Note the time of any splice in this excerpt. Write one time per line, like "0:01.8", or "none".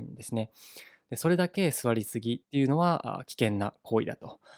0:02.4